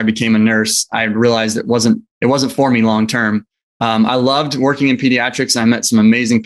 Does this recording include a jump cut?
no; 0 cuts

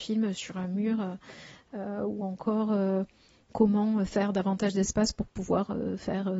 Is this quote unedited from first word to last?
yes; 0 cuts

